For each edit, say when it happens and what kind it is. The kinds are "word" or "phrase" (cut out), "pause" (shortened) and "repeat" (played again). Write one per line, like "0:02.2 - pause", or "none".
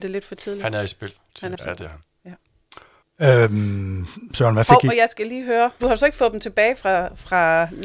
0:01.5 - phrase
0:03.0 - pause
0:05.8 - phrase